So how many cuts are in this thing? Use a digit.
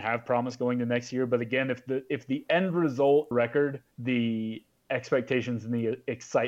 2